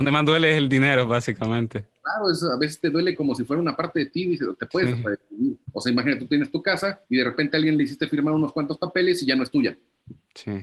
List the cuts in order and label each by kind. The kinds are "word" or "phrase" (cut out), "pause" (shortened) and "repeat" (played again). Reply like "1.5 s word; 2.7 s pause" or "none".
5.6 s pause; 7.0 s pause